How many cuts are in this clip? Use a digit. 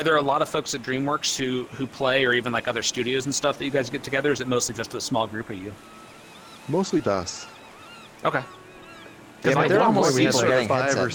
1